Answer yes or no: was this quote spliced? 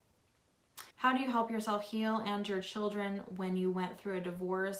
yes